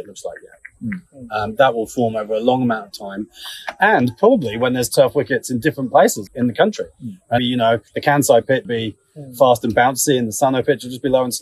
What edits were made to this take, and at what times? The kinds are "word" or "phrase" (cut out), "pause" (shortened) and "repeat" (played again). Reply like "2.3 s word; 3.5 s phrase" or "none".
6.3 s word; 7.4 s word; 7.9 s pause; 8.6 s word